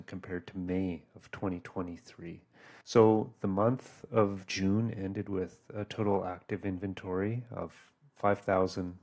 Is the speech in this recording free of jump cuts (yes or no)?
no